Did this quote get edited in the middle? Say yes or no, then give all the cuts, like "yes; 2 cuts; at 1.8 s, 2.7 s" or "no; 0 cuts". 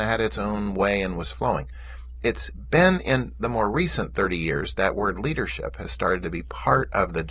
yes; 1 cut; at 4.7 s